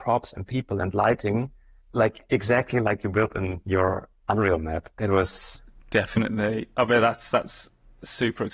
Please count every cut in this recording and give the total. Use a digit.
0